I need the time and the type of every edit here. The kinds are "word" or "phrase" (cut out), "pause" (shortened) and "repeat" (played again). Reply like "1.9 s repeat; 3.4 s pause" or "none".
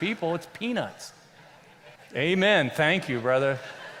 2.0 s pause